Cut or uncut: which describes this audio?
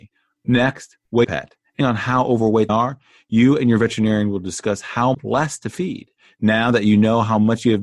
cut